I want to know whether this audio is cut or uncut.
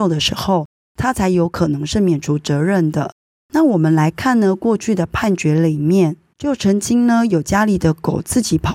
uncut